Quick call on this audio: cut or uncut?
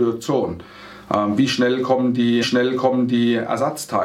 cut